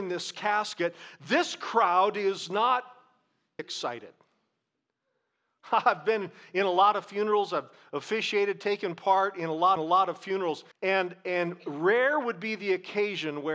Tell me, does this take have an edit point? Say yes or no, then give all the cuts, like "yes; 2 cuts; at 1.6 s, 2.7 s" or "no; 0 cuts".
yes; 3 cuts; at 3.6 s, 9.8 s, 10.7 s